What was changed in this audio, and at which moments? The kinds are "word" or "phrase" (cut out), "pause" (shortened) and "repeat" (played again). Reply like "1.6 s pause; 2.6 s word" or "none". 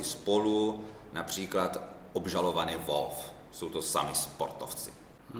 none